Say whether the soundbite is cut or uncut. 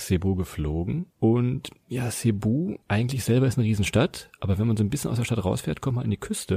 cut